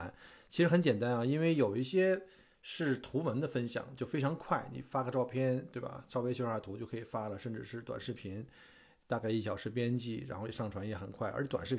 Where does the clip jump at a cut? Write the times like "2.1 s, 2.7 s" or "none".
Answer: none